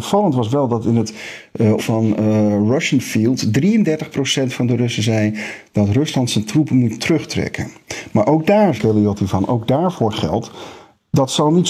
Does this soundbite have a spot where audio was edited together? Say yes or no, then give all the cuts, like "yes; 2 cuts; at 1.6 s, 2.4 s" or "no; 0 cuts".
yes; 2 cuts; at 1.8 s, 8.8 s